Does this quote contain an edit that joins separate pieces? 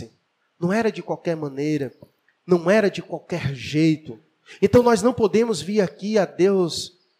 no; 0 cuts

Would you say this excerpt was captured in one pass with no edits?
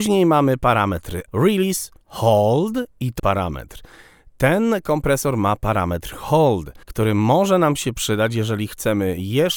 no; 4 cuts; at 1.3 s, 2.0 s, 3.2 s, 6.8 s

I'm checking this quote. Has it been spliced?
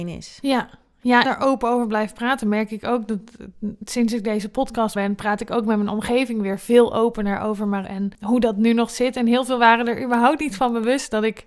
yes; 3 cuts; at 1.3 s, 5.0 s, 7.8 s

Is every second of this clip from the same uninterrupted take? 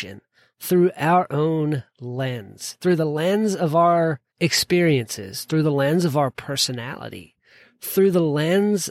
no; 1 cut; at 4.3 s

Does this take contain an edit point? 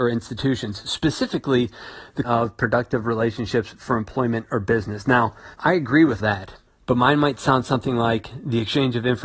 yes; 4 cuts; at 2.2 s, 5.5 s, 6.2 s, 6.7 s

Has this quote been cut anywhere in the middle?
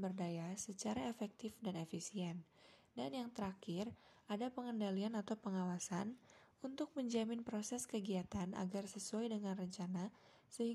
no; 0 cuts

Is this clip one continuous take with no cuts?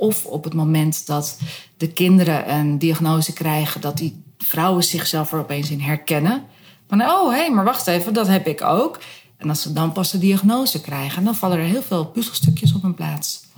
yes; 0 cuts

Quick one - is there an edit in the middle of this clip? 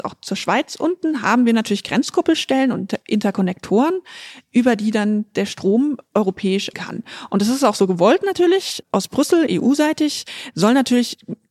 yes; 2 cuts; at 6.7 s, 8.8 s

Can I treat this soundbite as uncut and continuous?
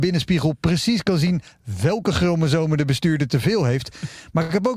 yes; 0 cuts

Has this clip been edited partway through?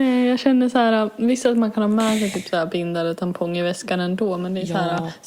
no; 0 cuts

